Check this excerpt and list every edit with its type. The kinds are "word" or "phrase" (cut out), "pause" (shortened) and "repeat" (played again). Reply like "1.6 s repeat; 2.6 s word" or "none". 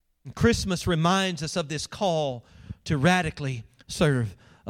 none